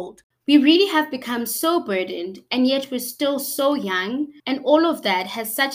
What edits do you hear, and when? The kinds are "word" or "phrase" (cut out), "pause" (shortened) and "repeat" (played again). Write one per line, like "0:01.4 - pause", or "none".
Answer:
0:04.4 - pause